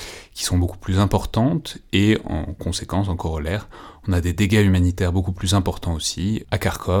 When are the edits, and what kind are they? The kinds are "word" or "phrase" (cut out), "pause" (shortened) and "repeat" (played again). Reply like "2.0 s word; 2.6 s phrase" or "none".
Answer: none